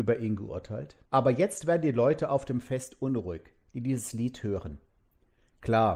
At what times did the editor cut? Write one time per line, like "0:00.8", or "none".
0:01.0